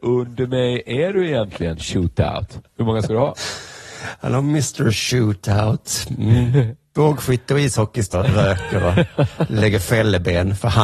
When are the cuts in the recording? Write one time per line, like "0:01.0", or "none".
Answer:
0:08.1